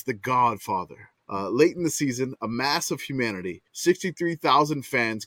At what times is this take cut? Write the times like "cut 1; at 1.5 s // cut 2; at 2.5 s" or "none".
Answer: cut 1; at 3.7 s

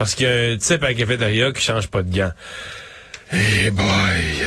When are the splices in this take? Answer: cut 1; at 3.2 s

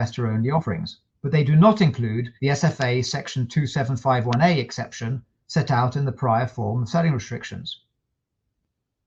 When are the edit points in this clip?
cut 1; at 1.1 s // cut 2; at 2.4 s

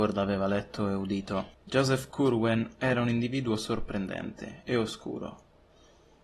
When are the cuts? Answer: cut 1; at 1.5 s // cut 2; at 4.6 s

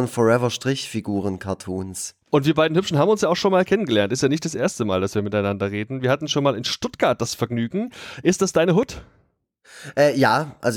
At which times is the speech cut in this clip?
cut 1; at 2.2 s

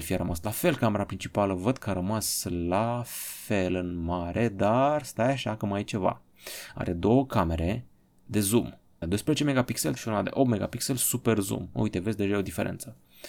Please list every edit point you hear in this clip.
cut 1; at 9.0 s // cut 2; at 10.0 s

